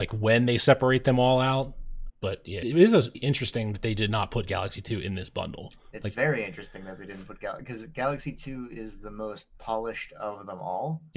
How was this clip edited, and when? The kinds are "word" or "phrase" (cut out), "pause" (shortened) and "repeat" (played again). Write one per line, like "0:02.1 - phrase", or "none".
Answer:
0:02.1 - word
0:02.6 - word
0:03.1 - word